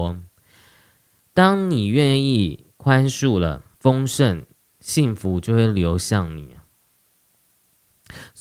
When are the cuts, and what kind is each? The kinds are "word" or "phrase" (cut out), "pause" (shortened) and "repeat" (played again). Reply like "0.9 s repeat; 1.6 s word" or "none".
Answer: 3.7 s pause; 4.6 s pause